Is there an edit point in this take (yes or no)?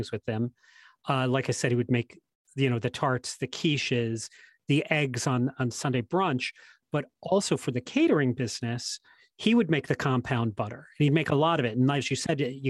no